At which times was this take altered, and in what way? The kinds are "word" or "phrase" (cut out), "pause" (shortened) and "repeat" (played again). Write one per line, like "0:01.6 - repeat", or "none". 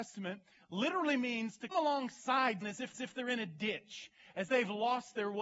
0:01.7 - word
0:02.6 - word
0:02.9 - repeat
0:04.5 - word